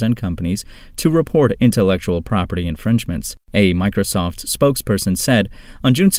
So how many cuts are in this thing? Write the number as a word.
one